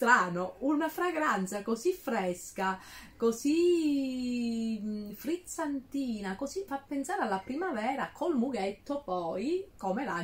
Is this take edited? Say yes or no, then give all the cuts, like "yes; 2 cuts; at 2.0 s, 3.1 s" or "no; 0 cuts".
yes; 1 cut; at 6.7 s